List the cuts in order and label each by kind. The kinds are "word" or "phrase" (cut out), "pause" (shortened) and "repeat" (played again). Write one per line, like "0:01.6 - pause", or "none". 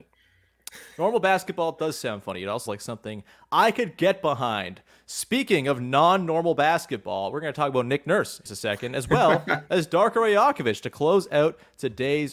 0:02.7 - word
0:08.5 - word